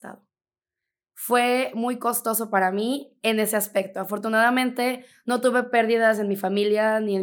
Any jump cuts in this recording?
no; 0 cuts

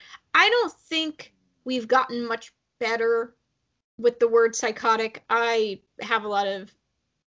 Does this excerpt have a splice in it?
no; 0 cuts

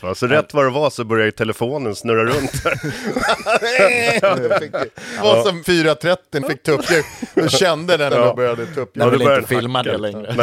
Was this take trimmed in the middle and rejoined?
yes; 4 cuts; at 5.2 s, 5.6 s, 6.4 s, 8.1 s

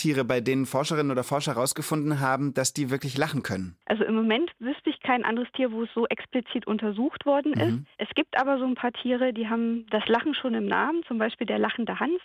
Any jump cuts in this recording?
yes; 2 cuts; at 3.8 s, 7.9 s

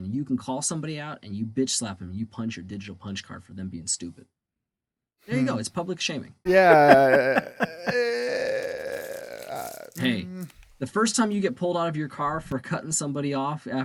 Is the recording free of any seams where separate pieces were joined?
yes; 0 cuts

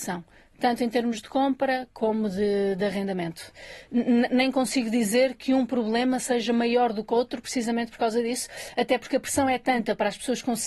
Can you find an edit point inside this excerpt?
no; 0 cuts

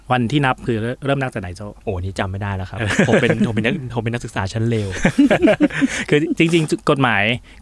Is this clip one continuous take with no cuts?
no; 1 cut; at 1.8 s

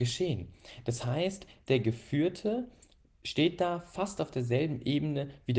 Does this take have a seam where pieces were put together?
no; 0 cuts

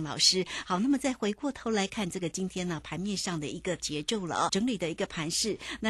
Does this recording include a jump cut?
yes; 1 cut; at 4.5 s

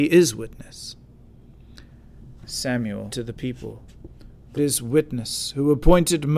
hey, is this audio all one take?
no; 2 cuts; at 3.1 s, 4.6 s

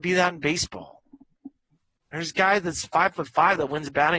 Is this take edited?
no; 0 cuts

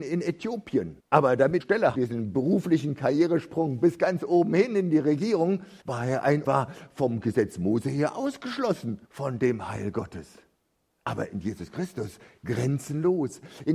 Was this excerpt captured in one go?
no; 7 cuts; at 1.0 s, 1.6 s, 1.9 s, 5.8 s, 6.4 s, 9.0 s, 10.5 s

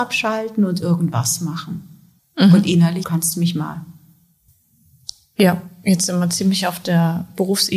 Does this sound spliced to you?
yes; 3 cuts; at 2.2 s, 3.0 s, 4.5 s

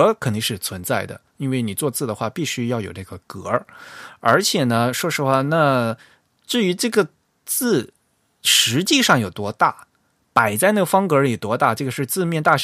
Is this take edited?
no; 0 cuts

